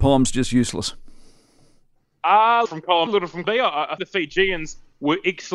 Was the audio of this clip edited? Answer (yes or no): yes